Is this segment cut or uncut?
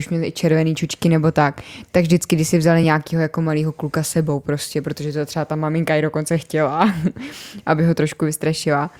uncut